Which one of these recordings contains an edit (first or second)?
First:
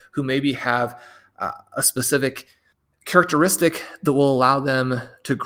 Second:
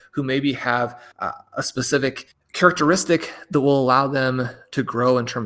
second